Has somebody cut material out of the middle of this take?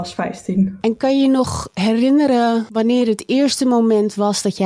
no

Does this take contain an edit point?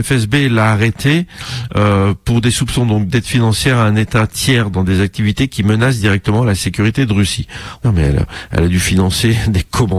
yes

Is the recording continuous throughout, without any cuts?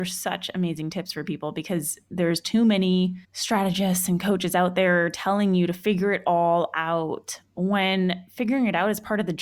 no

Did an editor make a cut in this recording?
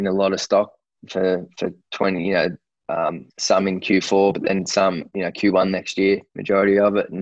yes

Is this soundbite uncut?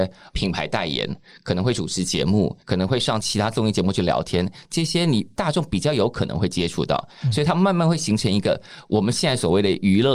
no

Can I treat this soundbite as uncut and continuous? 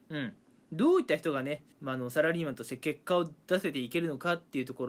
no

